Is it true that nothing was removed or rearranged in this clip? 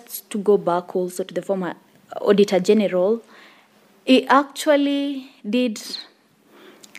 yes; 0 cuts

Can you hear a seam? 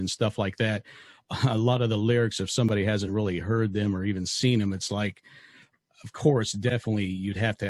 no; 0 cuts

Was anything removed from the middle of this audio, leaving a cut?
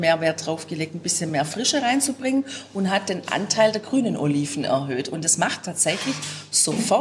no; 0 cuts

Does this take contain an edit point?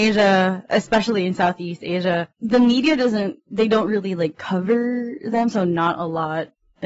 no; 0 cuts

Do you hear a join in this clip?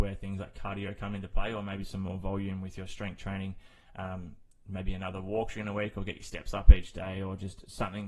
no; 0 cuts

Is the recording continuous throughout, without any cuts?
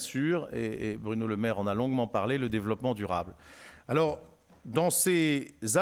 yes; 0 cuts

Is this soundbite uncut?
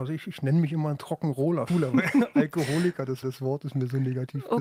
no; 2 cuts; at 1.7 s, 3.2 s

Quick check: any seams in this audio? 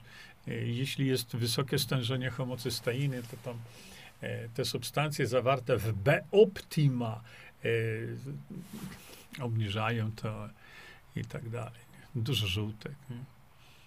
no; 0 cuts

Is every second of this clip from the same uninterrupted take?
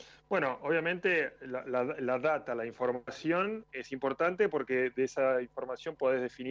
yes; 0 cuts

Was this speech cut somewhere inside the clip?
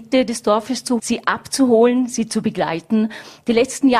yes; 1 cut; at 1.0 s

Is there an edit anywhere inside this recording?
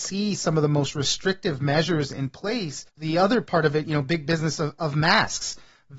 yes; 1 cut; at 2.9 s

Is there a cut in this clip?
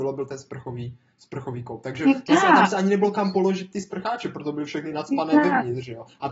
no; 0 cuts

